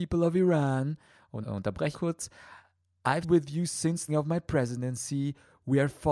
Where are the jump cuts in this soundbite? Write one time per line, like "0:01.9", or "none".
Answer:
0:01.4
0:01.9
0:03.2
0:04.1